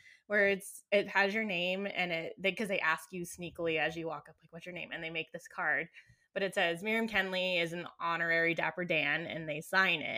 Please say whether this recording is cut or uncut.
uncut